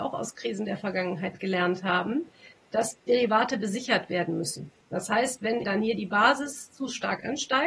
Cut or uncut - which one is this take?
cut